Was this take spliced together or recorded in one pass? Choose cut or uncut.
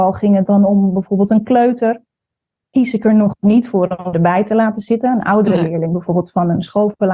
cut